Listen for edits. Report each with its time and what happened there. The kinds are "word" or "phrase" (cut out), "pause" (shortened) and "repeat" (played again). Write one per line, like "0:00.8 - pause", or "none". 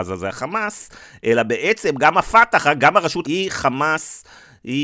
0:03.2 - word